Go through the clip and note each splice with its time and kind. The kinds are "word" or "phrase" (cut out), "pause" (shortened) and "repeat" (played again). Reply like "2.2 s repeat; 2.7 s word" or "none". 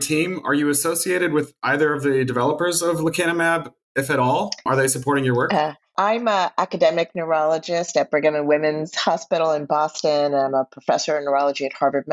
none